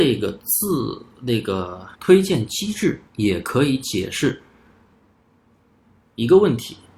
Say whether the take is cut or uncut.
cut